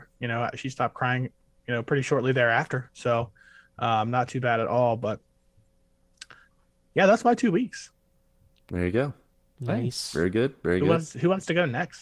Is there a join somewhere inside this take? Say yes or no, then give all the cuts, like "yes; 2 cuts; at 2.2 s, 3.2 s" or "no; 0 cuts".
no; 0 cuts